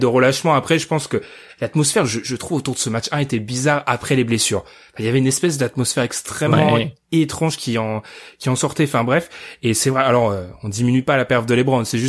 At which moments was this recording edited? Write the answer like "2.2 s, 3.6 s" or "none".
none